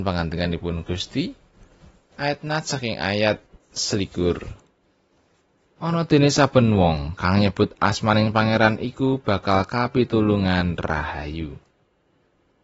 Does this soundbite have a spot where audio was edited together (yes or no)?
no